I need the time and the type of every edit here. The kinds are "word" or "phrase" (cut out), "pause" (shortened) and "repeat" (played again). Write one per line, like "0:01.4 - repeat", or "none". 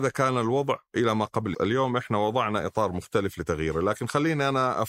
0:01.5 - phrase